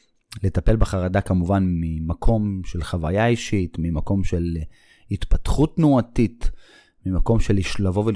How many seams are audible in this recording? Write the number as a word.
zero